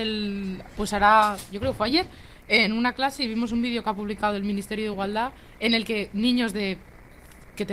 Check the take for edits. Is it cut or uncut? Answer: uncut